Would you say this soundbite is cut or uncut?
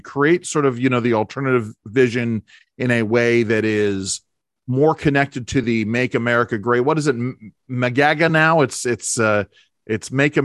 uncut